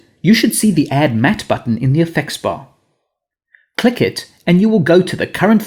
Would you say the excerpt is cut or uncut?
uncut